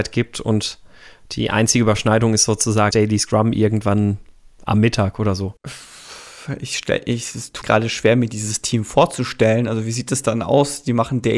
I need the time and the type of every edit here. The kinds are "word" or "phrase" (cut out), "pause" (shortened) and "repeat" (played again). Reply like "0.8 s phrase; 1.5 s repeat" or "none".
2.9 s word; 5.6 s pause; 7.6 s word